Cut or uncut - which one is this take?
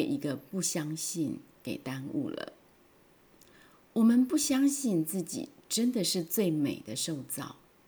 uncut